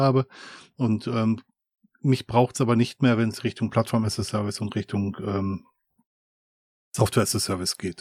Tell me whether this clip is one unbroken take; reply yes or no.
yes